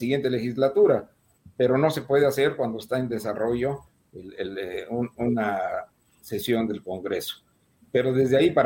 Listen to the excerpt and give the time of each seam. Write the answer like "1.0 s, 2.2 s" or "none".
none